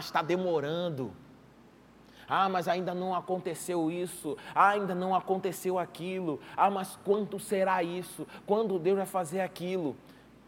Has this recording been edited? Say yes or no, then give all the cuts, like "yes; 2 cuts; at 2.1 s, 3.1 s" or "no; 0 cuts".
no; 0 cuts